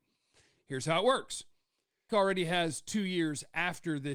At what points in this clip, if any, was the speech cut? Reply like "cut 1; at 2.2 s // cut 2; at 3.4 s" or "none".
cut 1; at 2.1 s